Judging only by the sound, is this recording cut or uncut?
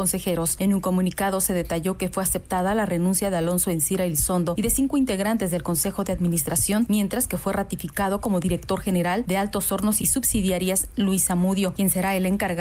uncut